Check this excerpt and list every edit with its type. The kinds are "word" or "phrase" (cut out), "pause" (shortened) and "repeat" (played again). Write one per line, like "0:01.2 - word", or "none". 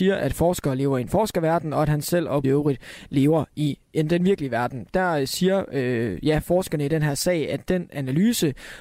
0:02.4 - word

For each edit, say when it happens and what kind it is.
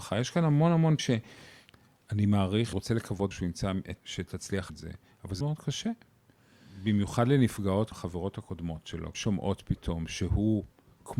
0:01.0 - word
0:02.7 - word
0:03.3 - word
0:04.0 - word
0:04.7 - word
0:05.4 - word
0:07.9 - word
0:09.1 - word

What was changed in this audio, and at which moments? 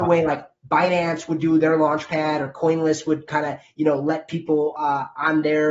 none

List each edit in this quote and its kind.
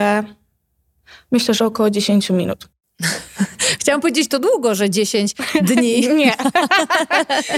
none

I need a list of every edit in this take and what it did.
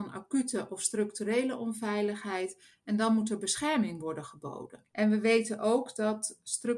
0:04.9 - pause

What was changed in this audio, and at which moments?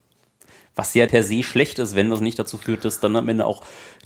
0:01.1 - word

